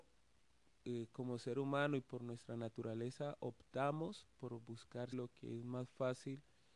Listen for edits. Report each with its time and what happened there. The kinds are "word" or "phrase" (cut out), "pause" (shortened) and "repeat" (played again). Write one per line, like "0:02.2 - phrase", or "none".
0:05.1 - word